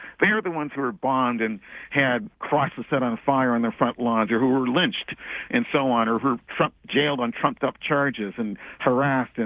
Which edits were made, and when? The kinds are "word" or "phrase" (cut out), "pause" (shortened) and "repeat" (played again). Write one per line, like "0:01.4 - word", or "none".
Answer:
0:02.3 - pause